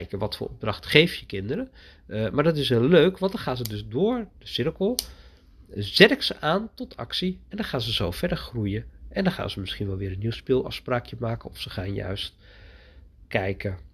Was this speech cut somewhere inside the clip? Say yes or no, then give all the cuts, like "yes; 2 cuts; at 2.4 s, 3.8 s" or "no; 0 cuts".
no; 0 cuts